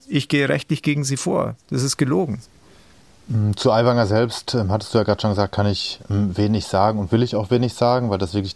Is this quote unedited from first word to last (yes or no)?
no